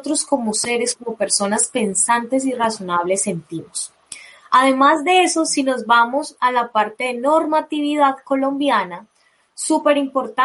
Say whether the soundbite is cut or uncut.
uncut